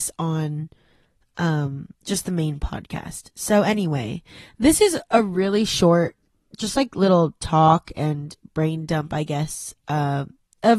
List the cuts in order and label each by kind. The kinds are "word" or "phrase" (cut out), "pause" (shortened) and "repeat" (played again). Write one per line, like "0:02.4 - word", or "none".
0:01.9 - pause